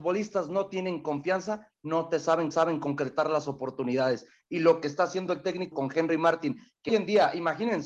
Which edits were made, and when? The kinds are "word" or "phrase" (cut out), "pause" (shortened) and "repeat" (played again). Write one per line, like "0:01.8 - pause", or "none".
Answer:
0:02.5 - repeat
0:05.7 - word
0:06.9 - word

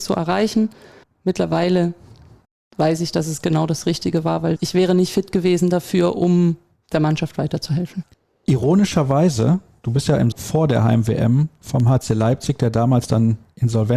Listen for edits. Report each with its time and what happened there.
0:01.0 - pause
0:08.1 - pause
0:10.3 - word

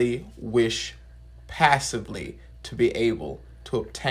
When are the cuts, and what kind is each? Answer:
none

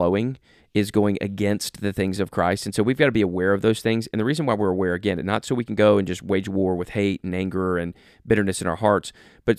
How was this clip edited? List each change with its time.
none

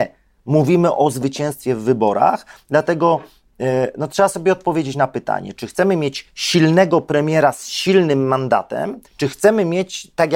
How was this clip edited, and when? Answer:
0:09.1 - pause

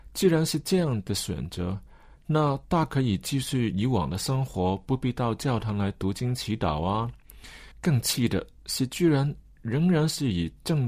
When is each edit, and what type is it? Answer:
0:07.7 - pause

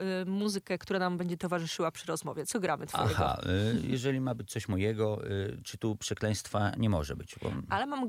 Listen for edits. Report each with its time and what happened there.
none

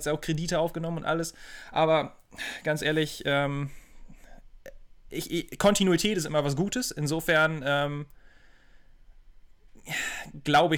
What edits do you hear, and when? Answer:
none

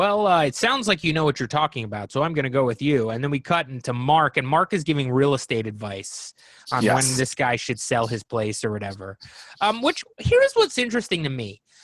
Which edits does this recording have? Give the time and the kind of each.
none

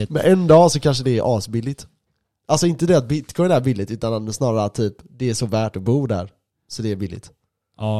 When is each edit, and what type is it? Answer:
none

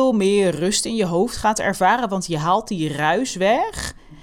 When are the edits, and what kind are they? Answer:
none

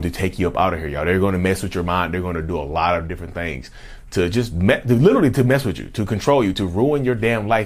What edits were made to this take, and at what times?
none

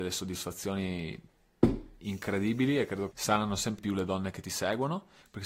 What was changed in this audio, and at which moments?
0:03.1 - word
0:03.8 - word

